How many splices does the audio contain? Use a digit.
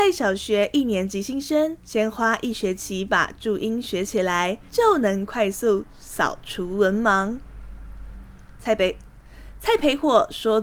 2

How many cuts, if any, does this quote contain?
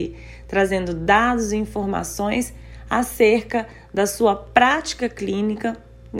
0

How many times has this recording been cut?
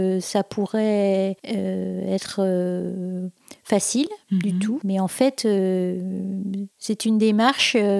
2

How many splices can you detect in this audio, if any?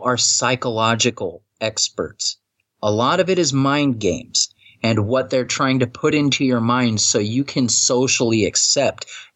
0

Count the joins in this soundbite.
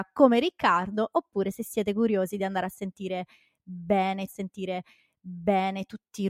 1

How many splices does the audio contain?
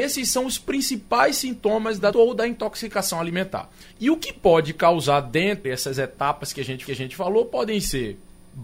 4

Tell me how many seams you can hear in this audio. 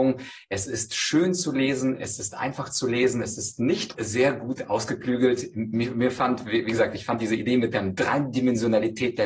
1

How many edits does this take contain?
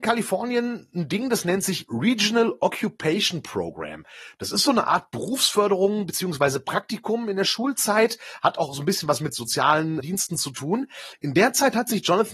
1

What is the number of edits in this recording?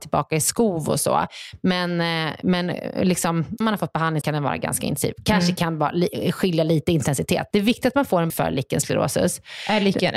4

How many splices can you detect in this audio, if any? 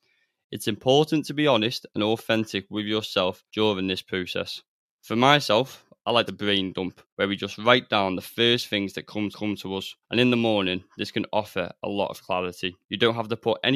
7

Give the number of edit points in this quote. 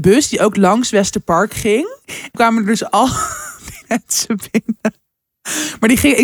2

